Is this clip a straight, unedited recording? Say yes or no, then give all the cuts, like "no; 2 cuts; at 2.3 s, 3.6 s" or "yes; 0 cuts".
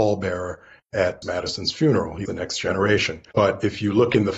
no; 3 cuts; at 1.2 s, 2.3 s, 3.3 s